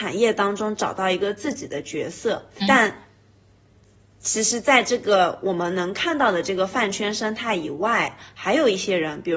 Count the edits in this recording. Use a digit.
1